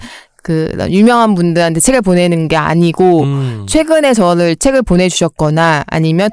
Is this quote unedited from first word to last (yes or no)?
yes